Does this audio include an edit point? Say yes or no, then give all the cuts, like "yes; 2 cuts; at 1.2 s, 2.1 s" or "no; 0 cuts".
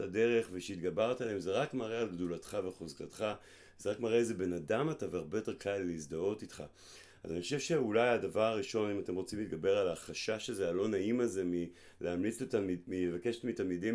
no; 0 cuts